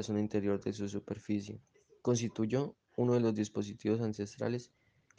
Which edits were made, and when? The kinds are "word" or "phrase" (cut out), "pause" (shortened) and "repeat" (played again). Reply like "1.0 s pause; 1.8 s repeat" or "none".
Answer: 1.7 s pause